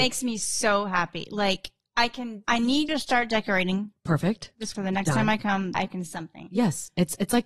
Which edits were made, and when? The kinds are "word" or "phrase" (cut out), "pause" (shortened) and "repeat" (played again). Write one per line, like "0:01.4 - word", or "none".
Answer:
0:02.4 - word
0:02.9 - word
0:04.7 - word
0:05.7 - word
0:06.1 - word